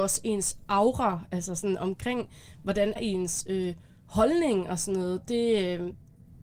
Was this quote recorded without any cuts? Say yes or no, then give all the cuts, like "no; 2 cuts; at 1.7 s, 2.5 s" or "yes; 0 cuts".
no; 1 cut; at 3.0 s